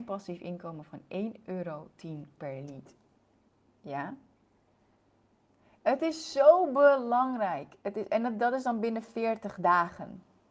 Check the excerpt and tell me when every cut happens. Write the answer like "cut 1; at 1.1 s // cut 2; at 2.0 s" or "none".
none